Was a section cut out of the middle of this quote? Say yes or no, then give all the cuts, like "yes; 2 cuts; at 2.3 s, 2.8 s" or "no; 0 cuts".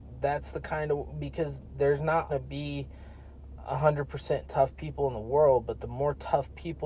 yes; 1 cut; at 2.3 s